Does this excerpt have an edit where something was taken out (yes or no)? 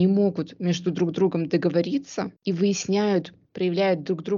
yes